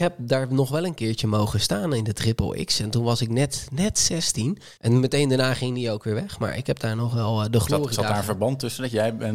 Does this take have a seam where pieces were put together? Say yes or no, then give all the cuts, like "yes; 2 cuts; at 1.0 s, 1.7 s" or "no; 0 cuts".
yes; 1 cut; at 4.8 s